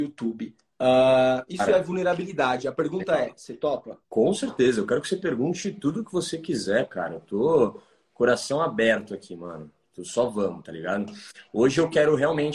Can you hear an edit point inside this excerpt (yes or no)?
yes